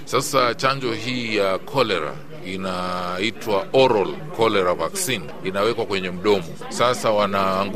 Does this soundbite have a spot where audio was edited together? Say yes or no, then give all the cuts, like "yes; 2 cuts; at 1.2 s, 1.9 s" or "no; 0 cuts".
no; 0 cuts